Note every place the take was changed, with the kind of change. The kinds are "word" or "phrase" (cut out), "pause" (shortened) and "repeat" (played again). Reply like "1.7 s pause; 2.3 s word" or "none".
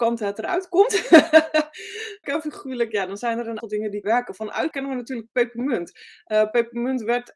2.2 s word; 3.6 s word; 4.0 s word; 4.7 s word